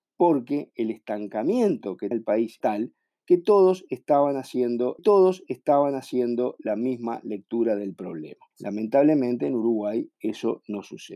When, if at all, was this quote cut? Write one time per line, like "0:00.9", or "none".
0:02.1
0:02.6
0:05.0
0:08.5